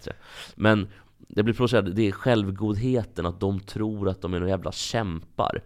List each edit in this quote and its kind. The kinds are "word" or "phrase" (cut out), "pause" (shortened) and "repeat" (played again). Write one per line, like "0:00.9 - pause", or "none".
none